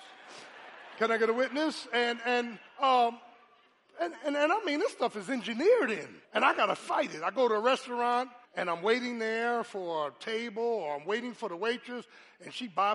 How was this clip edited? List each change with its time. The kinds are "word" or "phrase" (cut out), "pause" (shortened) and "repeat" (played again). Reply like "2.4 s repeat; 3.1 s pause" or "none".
2.7 s pause; 6.2 s pause; 8.5 s pause